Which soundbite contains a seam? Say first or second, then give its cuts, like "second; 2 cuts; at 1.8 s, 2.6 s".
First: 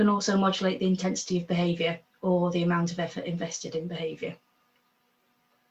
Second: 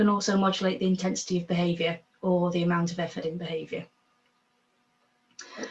second; 1 cut; at 3.2 s